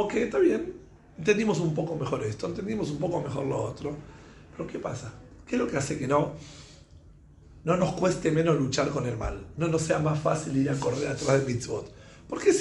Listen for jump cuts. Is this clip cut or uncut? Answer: uncut